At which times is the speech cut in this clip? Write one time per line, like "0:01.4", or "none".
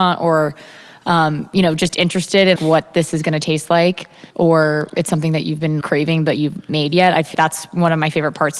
0:02.6
0:04.3
0:05.8
0:06.7
0:07.3